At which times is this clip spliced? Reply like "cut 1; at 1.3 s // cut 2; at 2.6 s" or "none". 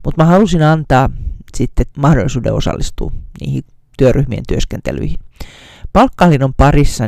cut 1; at 1.9 s